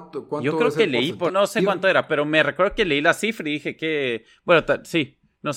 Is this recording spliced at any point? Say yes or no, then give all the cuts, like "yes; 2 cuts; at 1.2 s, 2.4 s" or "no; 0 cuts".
yes; 1 cut; at 1.3 s